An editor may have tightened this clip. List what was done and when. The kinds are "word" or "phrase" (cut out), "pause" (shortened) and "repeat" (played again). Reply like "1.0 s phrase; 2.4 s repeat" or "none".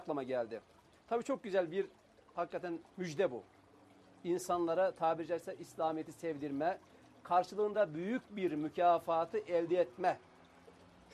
none